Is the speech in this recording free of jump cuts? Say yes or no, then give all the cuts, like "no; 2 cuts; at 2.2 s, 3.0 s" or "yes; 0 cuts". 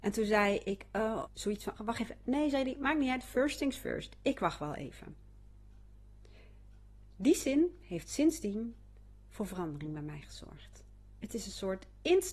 no; 2 cuts; at 1.3 s, 1.8 s